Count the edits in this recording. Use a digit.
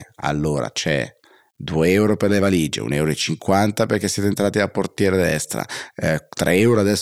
0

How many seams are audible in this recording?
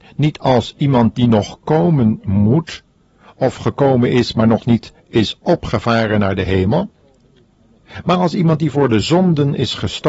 0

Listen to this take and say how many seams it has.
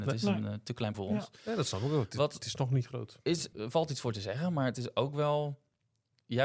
2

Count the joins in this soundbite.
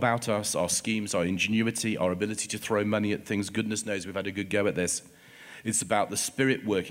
0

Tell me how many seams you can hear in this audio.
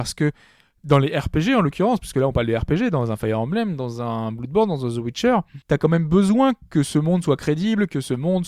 1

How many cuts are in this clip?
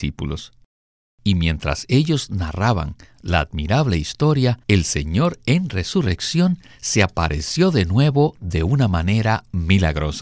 1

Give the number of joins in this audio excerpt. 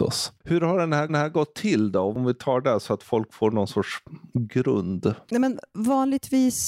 1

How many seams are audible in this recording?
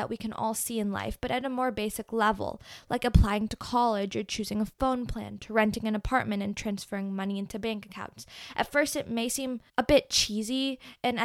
1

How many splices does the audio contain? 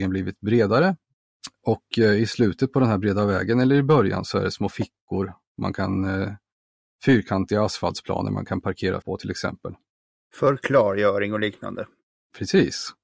1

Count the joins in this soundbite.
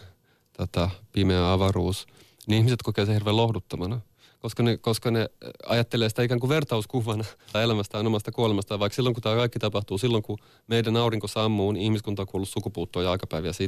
1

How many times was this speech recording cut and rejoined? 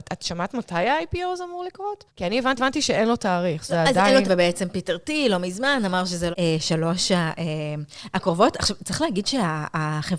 5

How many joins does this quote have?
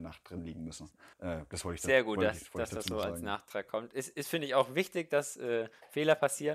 1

